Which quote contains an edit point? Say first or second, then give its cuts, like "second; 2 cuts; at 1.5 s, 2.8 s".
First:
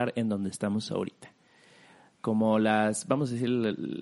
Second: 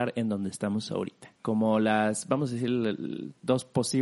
second; 1 cut; at 1.4 s